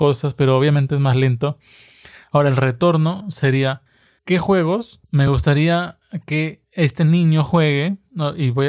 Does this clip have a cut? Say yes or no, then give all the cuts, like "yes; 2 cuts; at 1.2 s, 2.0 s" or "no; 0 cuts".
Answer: no; 0 cuts